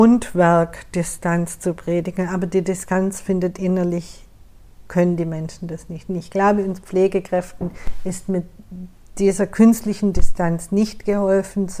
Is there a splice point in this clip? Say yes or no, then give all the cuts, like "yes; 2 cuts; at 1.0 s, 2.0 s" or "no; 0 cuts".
no; 0 cuts